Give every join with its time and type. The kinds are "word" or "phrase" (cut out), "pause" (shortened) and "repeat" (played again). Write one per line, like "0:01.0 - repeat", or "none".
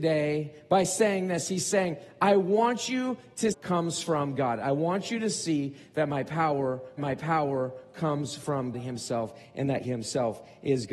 0:03.5 - phrase
0:07.0 - repeat
0:08.7 - word
0:09.8 - word

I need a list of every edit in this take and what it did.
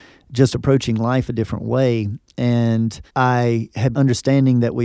0:03.1 - pause
0:03.9 - word

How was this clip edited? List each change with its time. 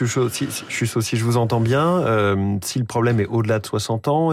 none

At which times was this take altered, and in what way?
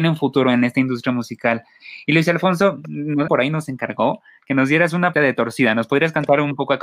0:03.3 - word
0:05.1 - word

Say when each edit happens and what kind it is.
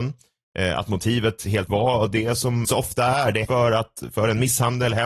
0:01.7 - word
0:02.6 - word
0:03.4 - word

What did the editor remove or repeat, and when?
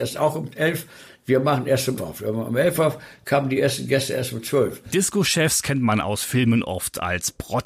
0:02.0 - word

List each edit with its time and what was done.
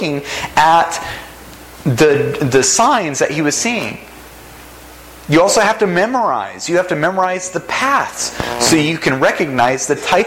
none

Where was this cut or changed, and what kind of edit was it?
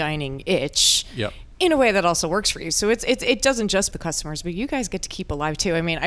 0:03.9 - word

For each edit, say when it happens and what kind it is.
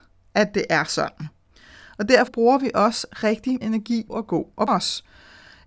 0:02.3 - word
0:03.6 - word
0:04.1 - word
0:04.7 - word

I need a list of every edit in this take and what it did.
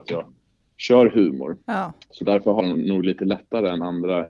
0:01.6 - pause
0:02.6 - word

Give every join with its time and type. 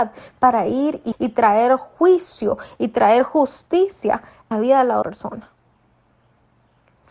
0:01.1 - word
0:04.5 - phrase
0:05.0 - word

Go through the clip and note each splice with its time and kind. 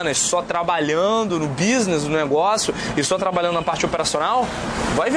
none

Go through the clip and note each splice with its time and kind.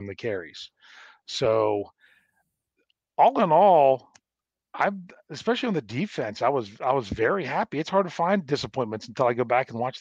none

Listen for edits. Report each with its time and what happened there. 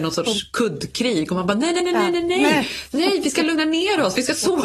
0:01.8 - word

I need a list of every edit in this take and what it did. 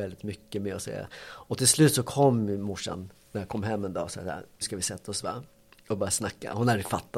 0:04.6 - word

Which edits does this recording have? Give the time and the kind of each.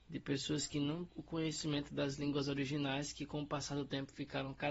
0:01.1 - word

